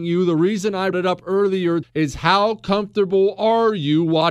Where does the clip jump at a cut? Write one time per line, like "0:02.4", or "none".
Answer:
0:00.9
0:01.8